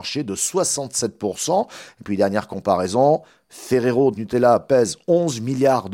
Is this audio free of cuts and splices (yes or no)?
no